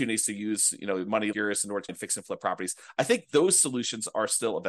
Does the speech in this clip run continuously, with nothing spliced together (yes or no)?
no